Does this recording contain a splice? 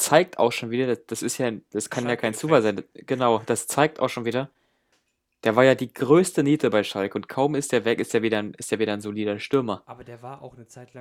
no; 0 cuts

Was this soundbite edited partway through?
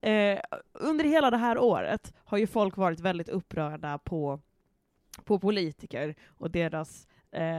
no; 0 cuts

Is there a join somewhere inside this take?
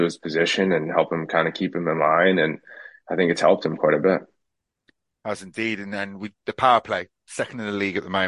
no; 0 cuts

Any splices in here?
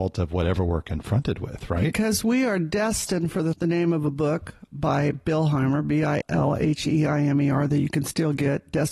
yes; 2 cuts; at 3.5 s, 6.2 s

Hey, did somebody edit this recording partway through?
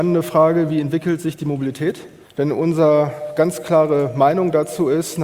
yes; 1 cut; at 2.3 s

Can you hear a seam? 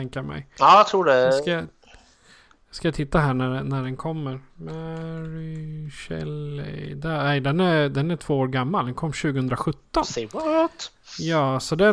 yes; 1 cut; at 4.5 s

